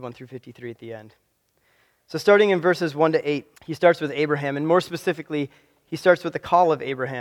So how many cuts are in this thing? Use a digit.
1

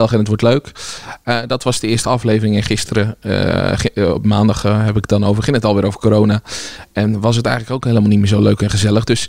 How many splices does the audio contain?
0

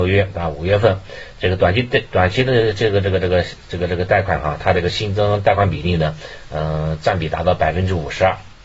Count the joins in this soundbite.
0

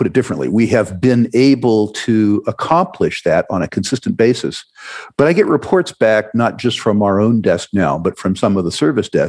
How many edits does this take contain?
0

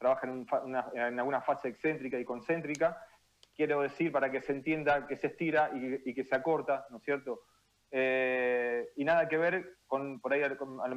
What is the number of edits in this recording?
0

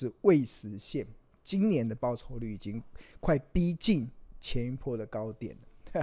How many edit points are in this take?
0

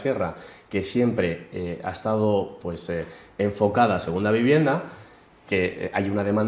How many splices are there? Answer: 0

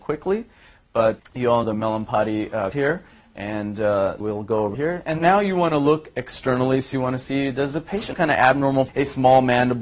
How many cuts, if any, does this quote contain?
8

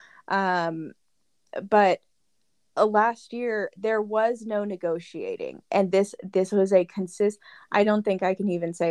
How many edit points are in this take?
0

